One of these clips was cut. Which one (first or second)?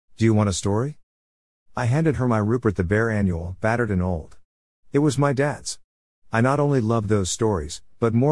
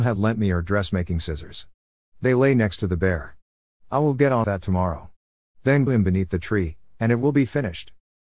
second